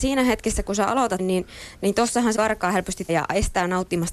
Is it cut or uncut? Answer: cut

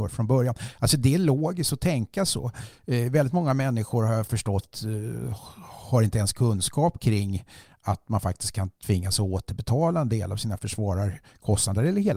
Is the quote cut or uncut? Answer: uncut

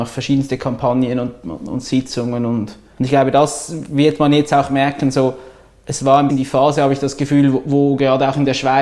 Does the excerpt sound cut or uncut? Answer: cut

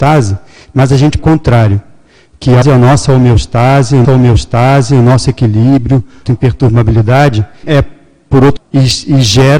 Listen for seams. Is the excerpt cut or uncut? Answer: cut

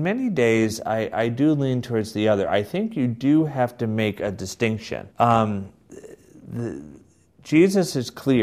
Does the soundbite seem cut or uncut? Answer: cut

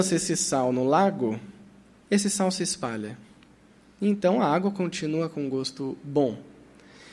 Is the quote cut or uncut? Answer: uncut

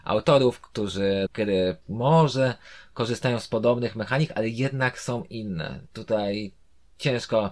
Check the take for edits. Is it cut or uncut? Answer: cut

